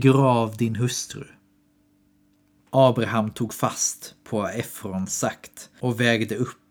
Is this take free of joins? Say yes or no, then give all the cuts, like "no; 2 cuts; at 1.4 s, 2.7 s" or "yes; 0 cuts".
yes; 0 cuts